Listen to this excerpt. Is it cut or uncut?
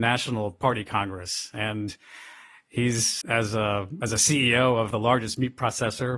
cut